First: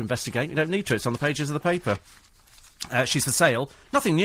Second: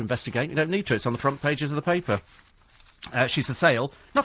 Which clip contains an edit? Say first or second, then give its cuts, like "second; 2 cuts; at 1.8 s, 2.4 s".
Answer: first; 1 cut; at 1.2 s